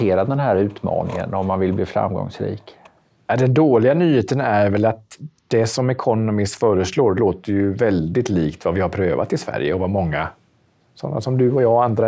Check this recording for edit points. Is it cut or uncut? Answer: uncut